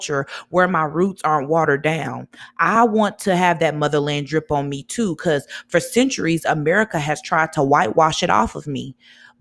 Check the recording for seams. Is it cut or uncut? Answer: uncut